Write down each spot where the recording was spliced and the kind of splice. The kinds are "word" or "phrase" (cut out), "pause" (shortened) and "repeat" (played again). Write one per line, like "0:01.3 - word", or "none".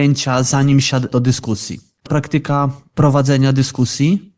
0:01.1 - phrase
0:02.1 - phrase